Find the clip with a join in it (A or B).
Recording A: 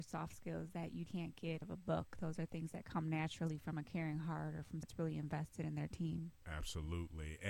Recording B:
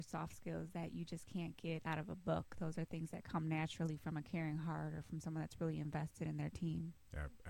A